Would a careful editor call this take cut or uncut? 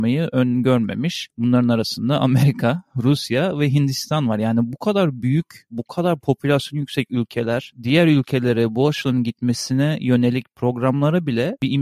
uncut